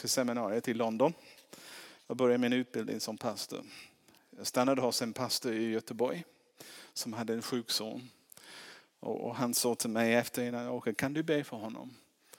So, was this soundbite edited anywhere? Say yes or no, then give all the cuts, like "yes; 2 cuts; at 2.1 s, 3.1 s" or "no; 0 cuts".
no; 0 cuts